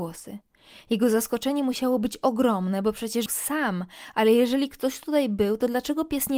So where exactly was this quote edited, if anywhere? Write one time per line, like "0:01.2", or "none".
0:03.3